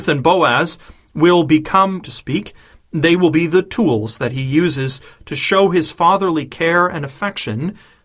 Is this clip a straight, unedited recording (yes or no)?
no